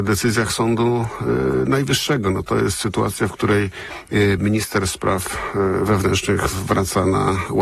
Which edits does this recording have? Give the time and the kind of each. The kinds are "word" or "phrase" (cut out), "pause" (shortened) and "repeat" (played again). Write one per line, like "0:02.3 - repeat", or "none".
none